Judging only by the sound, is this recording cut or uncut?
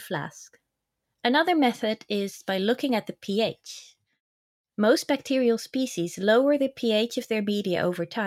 cut